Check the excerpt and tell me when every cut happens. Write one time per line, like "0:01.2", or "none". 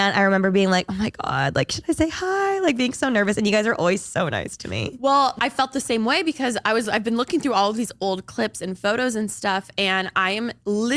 none